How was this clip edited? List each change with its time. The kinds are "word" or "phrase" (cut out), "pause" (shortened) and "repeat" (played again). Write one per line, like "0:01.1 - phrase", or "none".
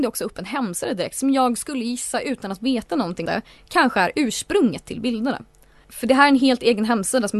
0:03.3 - word